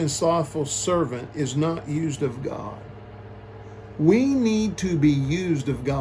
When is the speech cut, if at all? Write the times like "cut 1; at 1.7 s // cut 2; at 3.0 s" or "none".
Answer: none